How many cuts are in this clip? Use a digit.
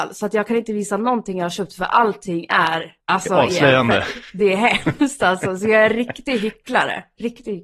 1